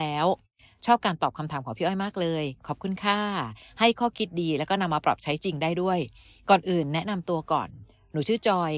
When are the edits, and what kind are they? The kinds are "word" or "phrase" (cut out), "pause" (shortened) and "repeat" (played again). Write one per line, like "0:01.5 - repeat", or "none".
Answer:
none